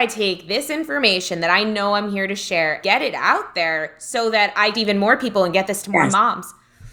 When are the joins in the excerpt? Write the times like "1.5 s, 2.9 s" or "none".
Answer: 2.8 s, 4.7 s